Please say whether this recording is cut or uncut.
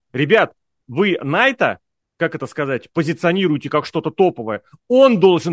uncut